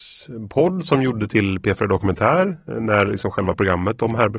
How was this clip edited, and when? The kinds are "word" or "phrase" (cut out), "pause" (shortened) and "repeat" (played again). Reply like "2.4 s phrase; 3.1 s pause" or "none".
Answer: none